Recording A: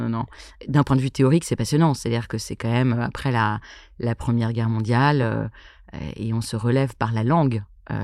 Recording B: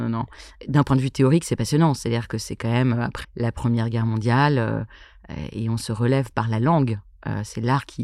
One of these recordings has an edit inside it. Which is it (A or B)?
B